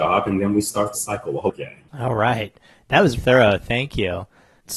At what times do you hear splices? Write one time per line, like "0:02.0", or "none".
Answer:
0:00.9
0:01.5
0:01.9
0:03.1